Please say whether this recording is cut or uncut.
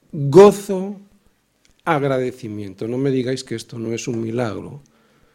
uncut